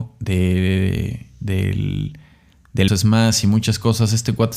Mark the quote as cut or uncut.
cut